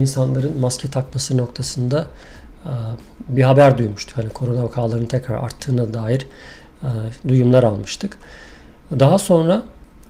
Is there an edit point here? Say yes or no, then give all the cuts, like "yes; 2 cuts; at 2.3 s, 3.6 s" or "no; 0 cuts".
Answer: no; 0 cuts